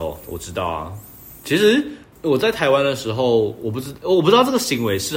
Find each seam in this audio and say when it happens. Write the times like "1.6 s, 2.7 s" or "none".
2.1 s